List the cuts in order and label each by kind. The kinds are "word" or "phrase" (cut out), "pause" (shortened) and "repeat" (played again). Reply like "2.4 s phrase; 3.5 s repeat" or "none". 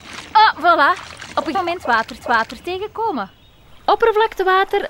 1.5 s word; 2.2 s repeat